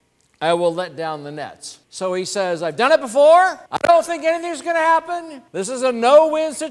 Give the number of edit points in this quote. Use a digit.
3